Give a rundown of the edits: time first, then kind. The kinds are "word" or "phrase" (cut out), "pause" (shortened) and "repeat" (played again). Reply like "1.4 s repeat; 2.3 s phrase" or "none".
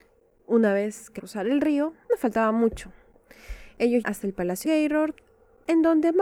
1.2 s word; 2.1 s word; 4.0 s word; 4.6 s word